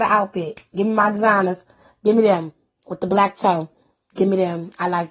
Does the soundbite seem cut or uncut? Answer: uncut